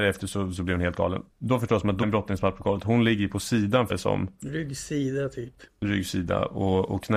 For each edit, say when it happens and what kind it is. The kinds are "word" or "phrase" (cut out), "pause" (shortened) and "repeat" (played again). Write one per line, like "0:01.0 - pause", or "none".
0:01.3 - pause
0:02.0 - word
0:03.9 - word